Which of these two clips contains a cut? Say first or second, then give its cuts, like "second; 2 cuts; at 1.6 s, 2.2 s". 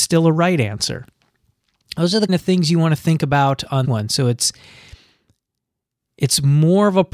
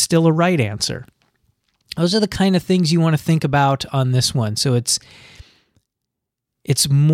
first; 2 cuts; at 2.3 s, 3.8 s